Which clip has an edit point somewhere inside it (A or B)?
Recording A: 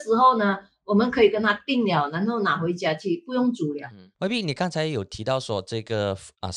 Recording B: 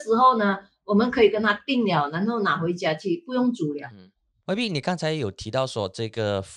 A